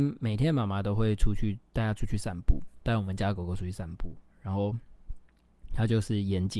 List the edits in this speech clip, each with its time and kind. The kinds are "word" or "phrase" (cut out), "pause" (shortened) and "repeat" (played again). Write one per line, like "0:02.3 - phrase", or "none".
0:01.7 - pause